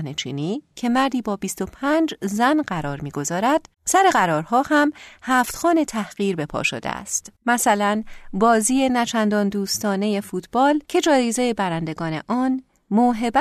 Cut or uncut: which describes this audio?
cut